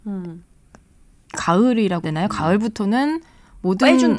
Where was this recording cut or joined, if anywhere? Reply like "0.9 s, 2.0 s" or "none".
2.0 s